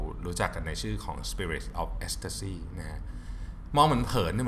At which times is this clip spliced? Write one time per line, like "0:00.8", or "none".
none